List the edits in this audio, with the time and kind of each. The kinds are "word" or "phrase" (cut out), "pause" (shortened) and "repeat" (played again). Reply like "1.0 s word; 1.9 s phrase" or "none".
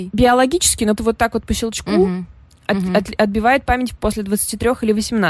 1.0 s word